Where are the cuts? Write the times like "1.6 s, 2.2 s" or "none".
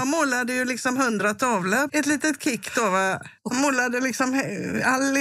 1.9 s, 3.4 s